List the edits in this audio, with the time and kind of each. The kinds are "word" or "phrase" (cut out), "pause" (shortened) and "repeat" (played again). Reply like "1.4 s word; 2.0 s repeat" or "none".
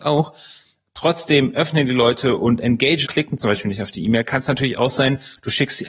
3.0 s word